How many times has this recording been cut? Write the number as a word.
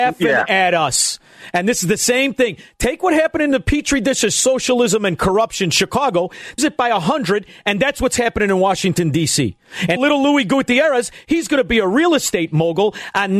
two